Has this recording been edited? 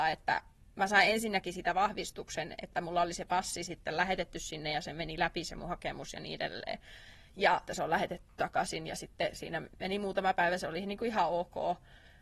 yes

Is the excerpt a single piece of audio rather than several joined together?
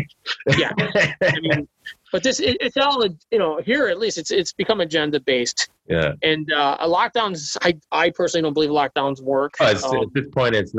yes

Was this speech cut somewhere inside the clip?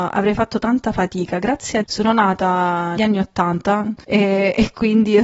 yes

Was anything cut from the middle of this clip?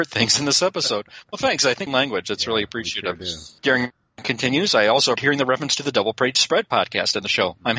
yes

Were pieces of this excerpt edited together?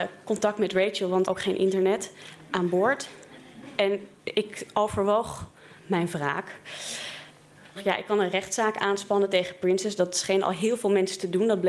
yes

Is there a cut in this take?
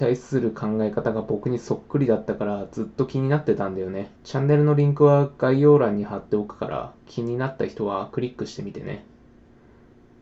yes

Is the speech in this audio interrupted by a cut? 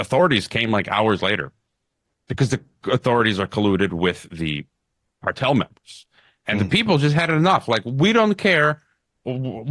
no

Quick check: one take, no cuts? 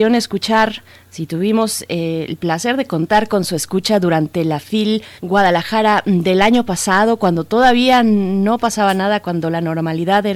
no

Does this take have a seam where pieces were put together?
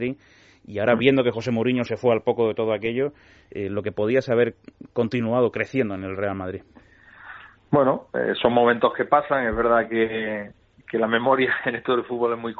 no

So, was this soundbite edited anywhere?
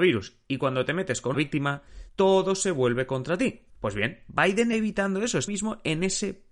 yes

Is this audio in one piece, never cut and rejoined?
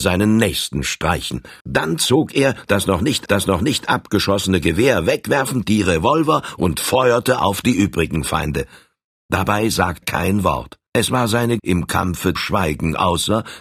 no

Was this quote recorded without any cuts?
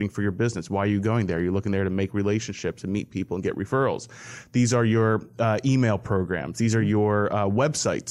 yes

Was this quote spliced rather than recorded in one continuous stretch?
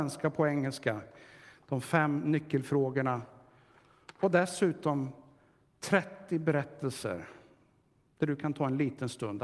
no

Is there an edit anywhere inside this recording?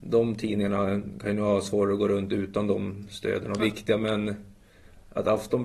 yes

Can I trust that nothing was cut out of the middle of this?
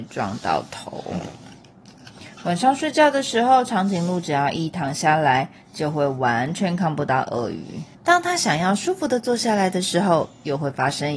no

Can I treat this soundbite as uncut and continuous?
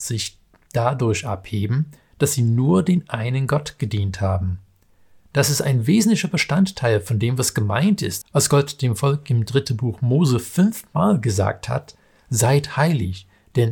yes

